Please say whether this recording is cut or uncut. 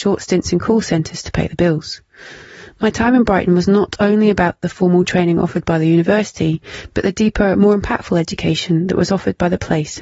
uncut